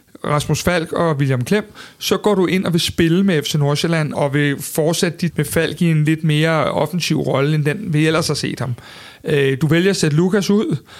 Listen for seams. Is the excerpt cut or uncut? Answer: cut